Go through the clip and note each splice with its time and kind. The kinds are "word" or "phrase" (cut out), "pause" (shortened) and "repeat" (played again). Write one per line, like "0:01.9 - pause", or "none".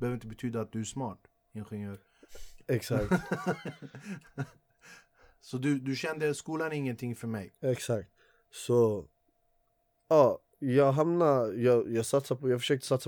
none